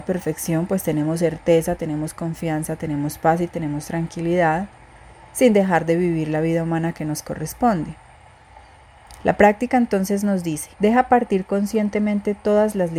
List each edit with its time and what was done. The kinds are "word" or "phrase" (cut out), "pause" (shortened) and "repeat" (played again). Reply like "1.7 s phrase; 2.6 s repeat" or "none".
10.7 s pause